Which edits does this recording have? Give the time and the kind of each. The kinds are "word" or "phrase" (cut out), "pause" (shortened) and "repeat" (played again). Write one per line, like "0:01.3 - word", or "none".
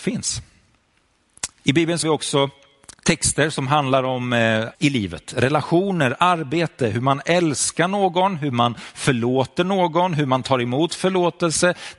0:01.5 - pause
0:02.0 - word
0:02.9 - pause
0:04.7 - word